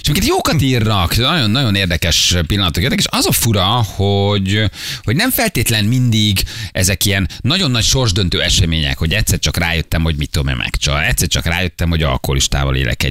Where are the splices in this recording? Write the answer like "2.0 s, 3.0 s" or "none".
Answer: none